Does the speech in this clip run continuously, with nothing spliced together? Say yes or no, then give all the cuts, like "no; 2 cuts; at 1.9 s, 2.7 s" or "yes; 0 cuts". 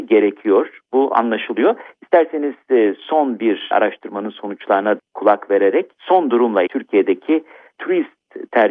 no; 3 cuts; at 3.7 s, 5.0 s, 6.7 s